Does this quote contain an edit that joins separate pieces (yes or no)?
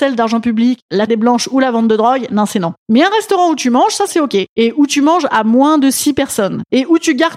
yes